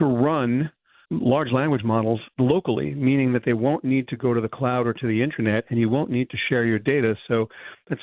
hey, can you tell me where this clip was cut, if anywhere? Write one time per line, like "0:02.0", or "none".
0:01.0